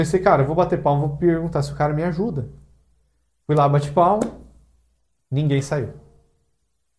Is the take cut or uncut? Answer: uncut